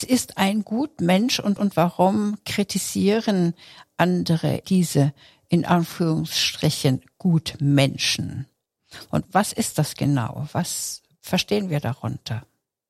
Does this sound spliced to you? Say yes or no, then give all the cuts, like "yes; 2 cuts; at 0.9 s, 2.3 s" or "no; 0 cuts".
yes; 3 cuts; at 1.6 s, 4.6 s, 9.2 s